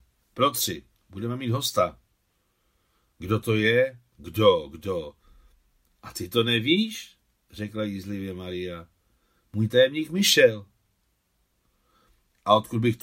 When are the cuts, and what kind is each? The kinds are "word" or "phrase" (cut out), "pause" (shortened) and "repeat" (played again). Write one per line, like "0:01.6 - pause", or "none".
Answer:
none